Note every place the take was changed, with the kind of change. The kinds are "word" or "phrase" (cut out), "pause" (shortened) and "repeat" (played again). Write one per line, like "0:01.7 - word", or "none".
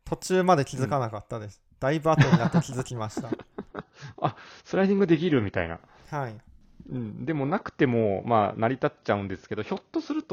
none